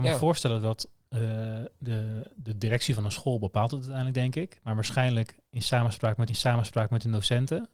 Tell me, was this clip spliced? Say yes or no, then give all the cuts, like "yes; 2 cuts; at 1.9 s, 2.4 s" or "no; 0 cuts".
yes; 1 cut; at 6.3 s